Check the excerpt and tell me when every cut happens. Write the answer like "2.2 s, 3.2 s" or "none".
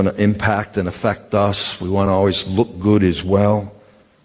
none